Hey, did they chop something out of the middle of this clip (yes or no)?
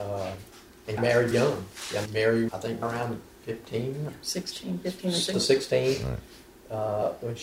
yes